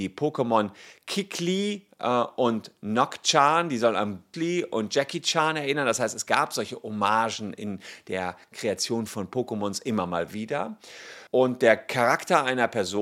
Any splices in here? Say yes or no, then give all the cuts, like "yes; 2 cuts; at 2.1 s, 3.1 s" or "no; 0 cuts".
yes; 2 cuts; at 4.3 s, 11.3 s